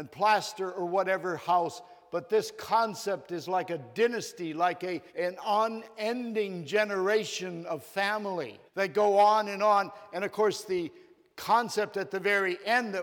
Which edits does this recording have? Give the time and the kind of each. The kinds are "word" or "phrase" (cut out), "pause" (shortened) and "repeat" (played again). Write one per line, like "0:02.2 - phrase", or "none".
0:05.1 - pause
0:08.7 - pause

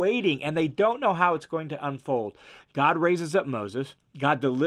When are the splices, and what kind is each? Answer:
0:02.6 - word

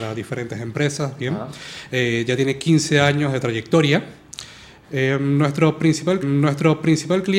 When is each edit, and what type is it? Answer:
0:06.2 - repeat

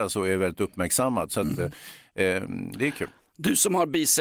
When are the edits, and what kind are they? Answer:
none

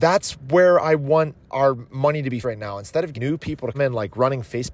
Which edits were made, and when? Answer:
0:01.5 - word
0:02.4 - word
0:03.1 - word
0:03.7 - word

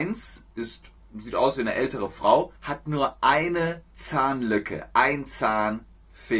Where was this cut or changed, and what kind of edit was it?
0:01.0 - pause
0:02.6 - pause

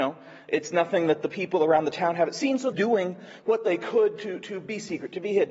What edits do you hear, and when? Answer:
0:02.7 - phrase

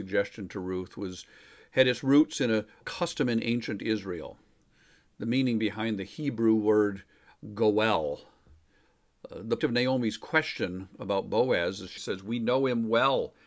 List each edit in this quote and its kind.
0:02.8 - word
0:09.6 - word
0:12.0 - word

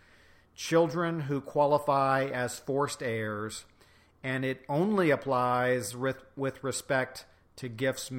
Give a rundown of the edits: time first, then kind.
none

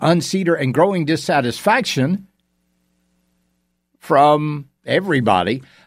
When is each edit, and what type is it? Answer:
0:04.8 - word

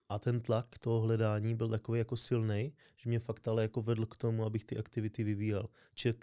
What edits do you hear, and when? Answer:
none

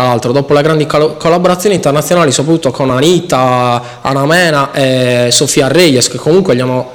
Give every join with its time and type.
none

